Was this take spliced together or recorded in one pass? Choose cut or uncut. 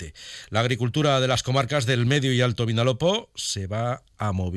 uncut